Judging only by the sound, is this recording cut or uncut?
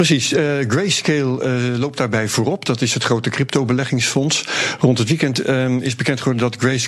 uncut